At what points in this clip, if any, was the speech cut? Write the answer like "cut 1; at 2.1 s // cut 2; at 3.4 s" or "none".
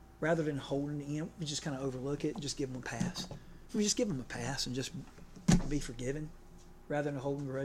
none